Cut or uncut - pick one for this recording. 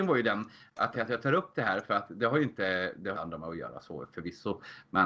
cut